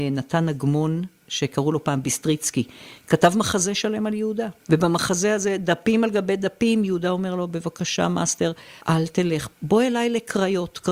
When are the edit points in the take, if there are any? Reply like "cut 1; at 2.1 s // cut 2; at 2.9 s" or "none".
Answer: cut 1; at 4.6 s // cut 2; at 8.8 s